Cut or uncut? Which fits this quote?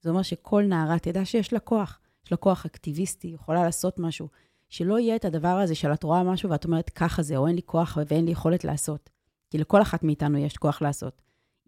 uncut